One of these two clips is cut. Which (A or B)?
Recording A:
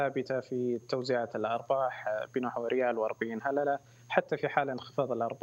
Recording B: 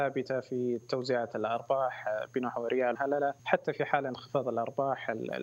B